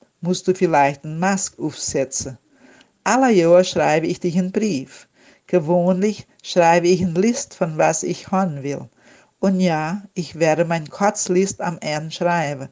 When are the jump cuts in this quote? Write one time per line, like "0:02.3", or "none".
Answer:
none

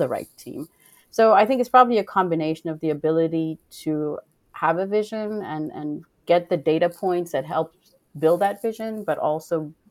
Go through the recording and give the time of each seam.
none

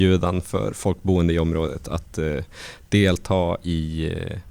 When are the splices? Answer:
none

